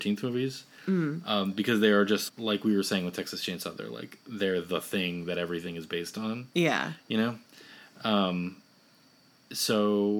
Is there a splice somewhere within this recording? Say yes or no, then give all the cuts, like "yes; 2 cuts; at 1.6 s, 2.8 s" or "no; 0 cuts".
yes; 1 cut; at 2.3 s